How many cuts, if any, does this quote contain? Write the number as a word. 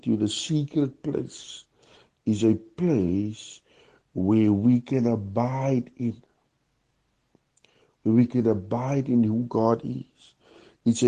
zero